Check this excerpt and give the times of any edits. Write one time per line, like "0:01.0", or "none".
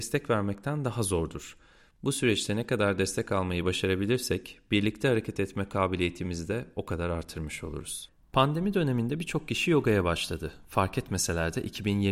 none